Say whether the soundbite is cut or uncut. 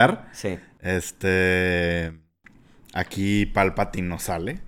uncut